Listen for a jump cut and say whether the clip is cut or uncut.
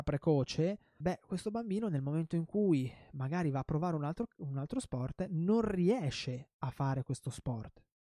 cut